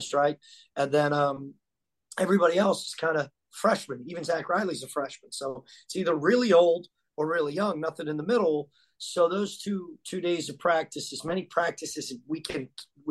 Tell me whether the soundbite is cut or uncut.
uncut